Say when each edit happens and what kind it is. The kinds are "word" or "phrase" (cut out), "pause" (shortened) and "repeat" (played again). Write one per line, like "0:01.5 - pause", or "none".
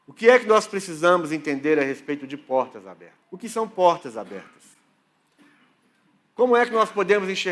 0:03.2 - pause